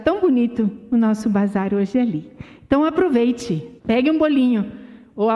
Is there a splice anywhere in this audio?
yes; 1 cut; at 3.8 s

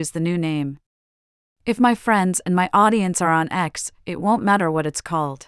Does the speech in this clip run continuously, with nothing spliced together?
yes; 0 cuts

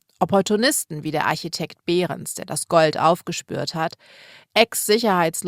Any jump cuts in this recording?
no; 0 cuts

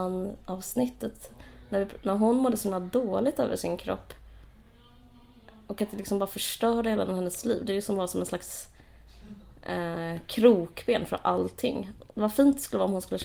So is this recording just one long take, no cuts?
yes; 0 cuts

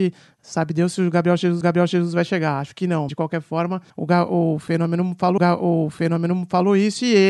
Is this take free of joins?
no; 4 cuts; at 1.6 s, 3.1 s, 3.9 s, 5.4 s

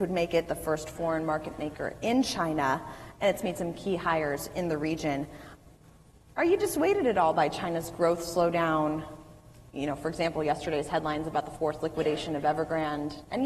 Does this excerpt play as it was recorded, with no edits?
yes; 0 cuts

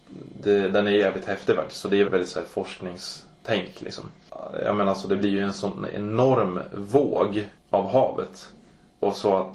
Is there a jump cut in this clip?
yes; 2 cuts; at 2.0 s, 7.6 s

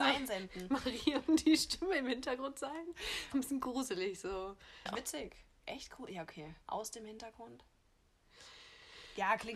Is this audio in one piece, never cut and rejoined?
no; 3 cuts; at 3.3 s, 4.9 s, 6.6 s

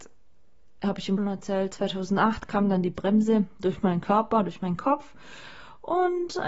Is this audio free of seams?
no; 1 cut; at 1.2 s

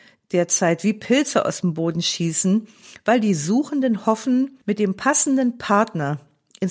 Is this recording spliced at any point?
yes; 1 cut; at 4.6 s

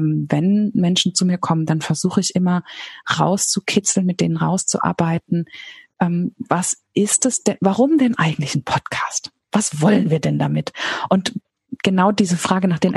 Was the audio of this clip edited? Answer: no; 0 cuts

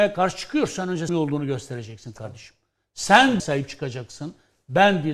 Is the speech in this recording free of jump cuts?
no; 2 cuts; at 1.1 s, 3.4 s

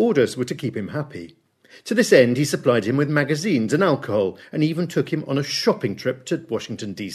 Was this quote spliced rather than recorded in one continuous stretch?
no; 0 cuts

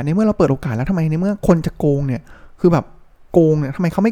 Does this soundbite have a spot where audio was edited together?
no; 0 cuts

